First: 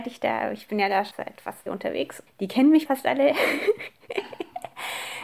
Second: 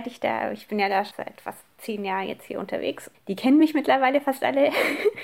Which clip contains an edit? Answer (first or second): first